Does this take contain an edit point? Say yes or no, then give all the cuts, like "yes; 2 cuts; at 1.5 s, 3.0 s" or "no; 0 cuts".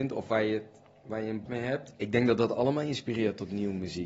yes; 1 cut; at 1.5 s